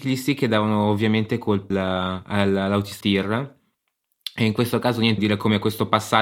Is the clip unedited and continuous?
no; 3 cuts; at 1.7 s, 3.0 s, 5.2 s

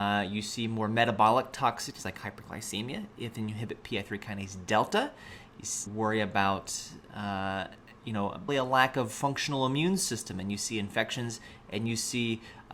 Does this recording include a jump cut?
yes; 2 cuts; at 5.9 s, 8.5 s

